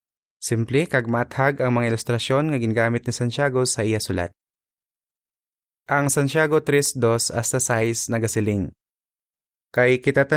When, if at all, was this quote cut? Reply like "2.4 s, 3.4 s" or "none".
none